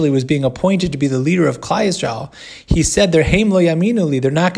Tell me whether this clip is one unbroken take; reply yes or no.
yes